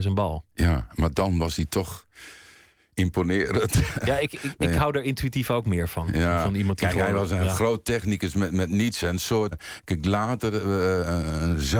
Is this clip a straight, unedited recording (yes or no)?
no